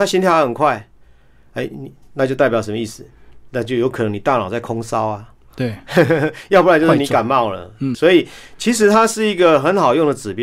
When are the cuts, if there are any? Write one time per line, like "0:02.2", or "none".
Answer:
0:07.9